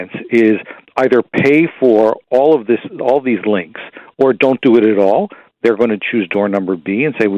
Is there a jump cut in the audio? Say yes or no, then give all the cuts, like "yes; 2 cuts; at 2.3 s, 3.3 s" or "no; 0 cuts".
no; 0 cuts